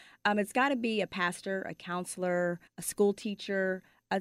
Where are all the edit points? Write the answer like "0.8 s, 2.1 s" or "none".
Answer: 2.7 s